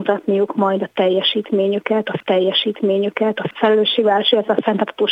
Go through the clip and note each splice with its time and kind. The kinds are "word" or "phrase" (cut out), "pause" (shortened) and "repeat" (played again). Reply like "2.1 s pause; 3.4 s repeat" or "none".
2.2 s repeat